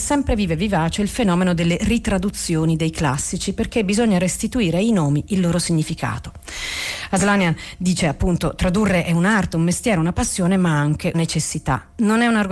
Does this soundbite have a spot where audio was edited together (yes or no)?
yes